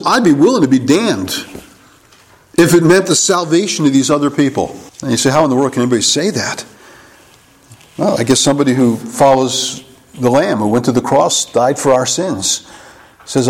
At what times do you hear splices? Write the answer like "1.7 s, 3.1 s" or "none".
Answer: 4.9 s